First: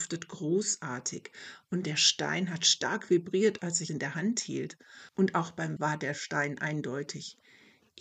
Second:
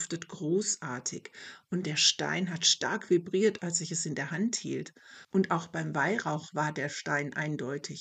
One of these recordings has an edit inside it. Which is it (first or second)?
first